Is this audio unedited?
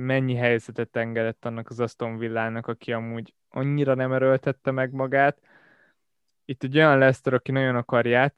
yes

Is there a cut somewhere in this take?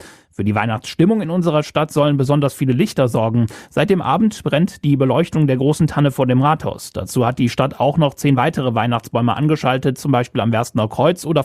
no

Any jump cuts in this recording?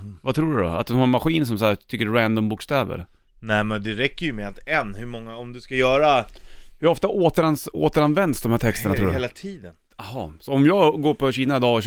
no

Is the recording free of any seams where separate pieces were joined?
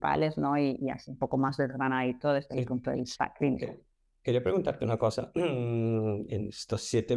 yes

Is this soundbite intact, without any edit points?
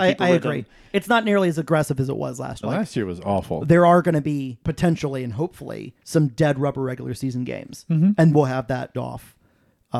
no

